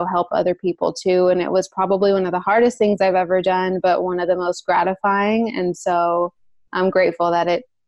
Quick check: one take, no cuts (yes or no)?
yes